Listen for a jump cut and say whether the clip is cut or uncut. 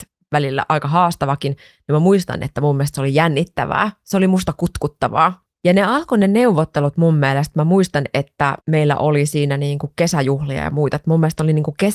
cut